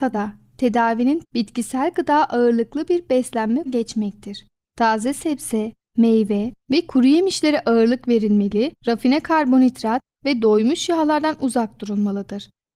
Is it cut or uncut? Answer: cut